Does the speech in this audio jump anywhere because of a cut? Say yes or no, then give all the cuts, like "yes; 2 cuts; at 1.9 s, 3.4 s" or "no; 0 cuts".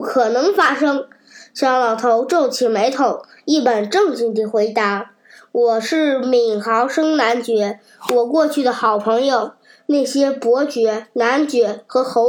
no; 0 cuts